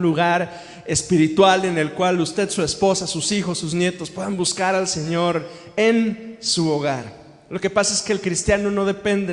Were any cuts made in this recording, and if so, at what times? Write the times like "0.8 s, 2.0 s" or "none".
none